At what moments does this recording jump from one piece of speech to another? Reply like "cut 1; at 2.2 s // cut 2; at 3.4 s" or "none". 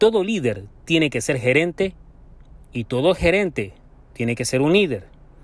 none